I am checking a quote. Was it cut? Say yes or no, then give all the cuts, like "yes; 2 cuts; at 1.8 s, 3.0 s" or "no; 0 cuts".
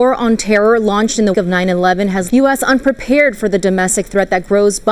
yes; 2 cuts; at 1.3 s, 2.3 s